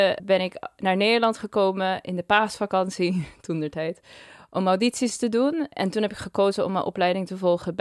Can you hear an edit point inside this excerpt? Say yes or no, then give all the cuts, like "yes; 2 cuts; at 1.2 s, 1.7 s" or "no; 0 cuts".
no; 0 cuts